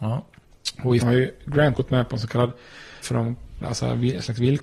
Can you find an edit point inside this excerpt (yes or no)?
yes